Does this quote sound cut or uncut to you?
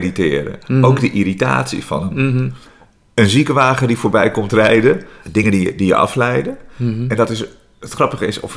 uncut